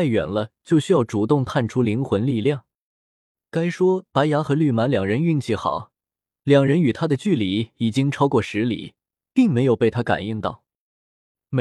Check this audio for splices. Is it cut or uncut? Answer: uncut